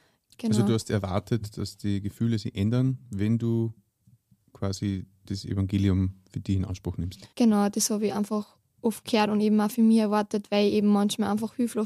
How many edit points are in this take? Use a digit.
1